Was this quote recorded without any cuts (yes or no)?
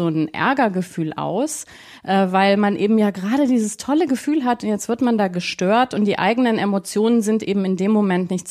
yes